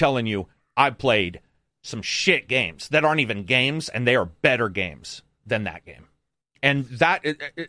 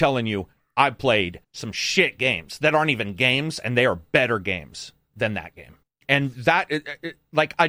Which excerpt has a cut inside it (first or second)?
second